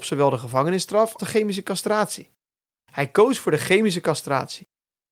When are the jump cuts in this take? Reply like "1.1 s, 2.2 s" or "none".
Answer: 1.2 s